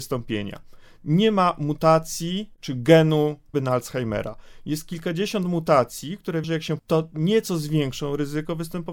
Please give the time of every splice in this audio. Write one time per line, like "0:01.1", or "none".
0:03.5
0:06.4
0:06.8